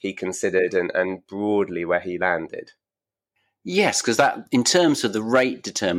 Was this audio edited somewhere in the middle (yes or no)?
no